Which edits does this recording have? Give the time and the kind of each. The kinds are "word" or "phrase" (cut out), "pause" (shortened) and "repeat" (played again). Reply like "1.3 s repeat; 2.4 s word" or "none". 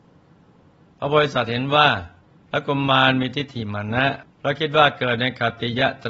2.2 s pause; 4.3 s pause